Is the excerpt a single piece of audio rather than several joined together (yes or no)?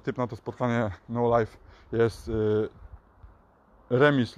yes